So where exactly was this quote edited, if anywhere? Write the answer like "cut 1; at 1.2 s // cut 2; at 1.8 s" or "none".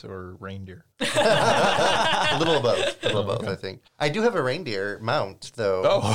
cut 1; at 0.9 s // cut 2; at 3.9 s